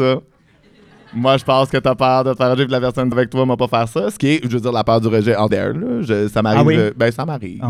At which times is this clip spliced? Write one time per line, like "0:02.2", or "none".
0:03.1
0:05.5